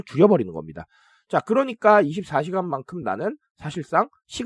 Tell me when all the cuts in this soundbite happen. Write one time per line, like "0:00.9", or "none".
none